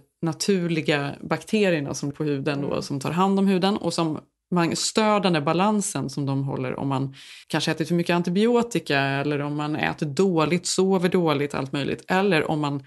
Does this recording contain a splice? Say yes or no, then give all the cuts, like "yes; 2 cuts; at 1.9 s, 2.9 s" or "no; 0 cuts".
yes; 2 cuts; at 2.1 s, 7.4 s